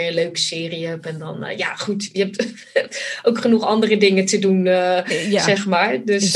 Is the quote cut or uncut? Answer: uncut